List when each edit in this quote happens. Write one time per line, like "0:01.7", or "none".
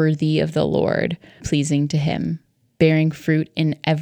0:01.4